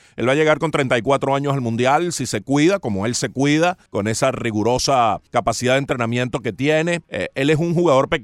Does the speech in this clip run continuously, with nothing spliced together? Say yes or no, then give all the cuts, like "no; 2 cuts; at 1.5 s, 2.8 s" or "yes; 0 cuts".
no; 3 cuts; at 3.9 s, 5.3 s, 7.0 s